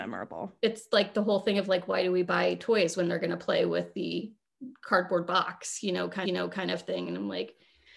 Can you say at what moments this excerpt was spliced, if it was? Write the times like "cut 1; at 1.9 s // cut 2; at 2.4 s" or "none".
cut 1; at 6.2 s

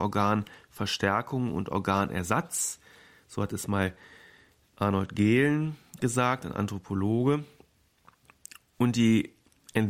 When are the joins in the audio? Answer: none

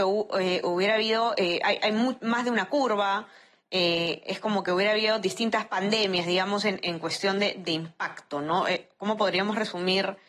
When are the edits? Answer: none

